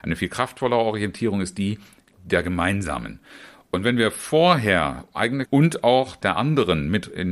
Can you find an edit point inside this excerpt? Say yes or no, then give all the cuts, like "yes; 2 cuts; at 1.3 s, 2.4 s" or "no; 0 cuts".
yes; 2 cuts; at 5.5 s, 6.2 s